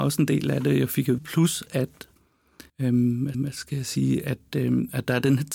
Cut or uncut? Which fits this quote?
cut